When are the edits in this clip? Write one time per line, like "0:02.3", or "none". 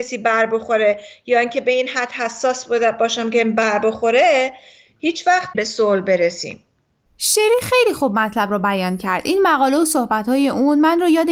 0:05.5